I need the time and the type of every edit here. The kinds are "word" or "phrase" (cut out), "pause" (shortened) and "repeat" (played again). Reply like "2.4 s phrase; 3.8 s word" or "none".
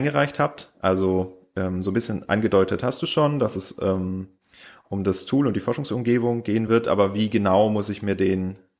none